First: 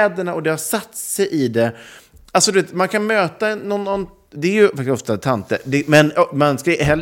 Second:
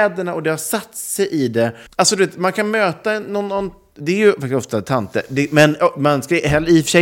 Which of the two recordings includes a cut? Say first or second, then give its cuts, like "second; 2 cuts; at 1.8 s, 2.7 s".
second; 1 cut; at 1.9 s